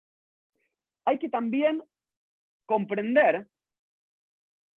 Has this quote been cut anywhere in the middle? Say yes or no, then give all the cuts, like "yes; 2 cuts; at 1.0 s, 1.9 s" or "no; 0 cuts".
no; 0 cuts